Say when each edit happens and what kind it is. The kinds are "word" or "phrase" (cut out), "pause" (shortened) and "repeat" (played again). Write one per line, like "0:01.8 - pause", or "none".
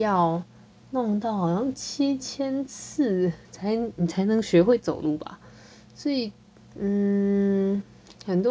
0:03.4 - pause